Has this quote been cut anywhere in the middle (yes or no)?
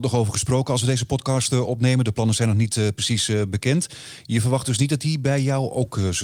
no